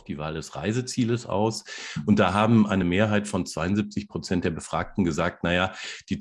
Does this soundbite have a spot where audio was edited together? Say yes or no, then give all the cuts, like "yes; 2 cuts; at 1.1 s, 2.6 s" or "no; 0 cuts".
no; 0 cuts